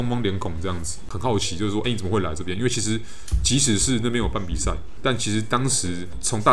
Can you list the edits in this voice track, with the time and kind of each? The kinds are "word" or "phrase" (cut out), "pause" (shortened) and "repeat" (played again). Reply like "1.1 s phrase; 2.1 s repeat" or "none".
1.8 s phrase; 5.0 s word